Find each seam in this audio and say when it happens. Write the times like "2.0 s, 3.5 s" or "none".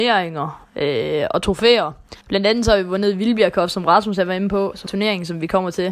2.2 s, 4.9 s